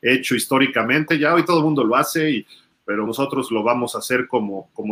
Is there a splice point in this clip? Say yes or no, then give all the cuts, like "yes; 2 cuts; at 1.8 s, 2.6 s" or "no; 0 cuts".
yes; 1 cut; at 3.1 s